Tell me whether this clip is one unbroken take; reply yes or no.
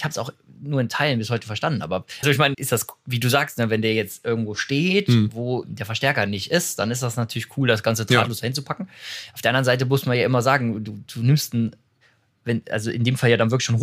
no